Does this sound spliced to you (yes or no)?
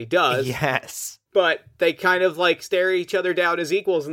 yes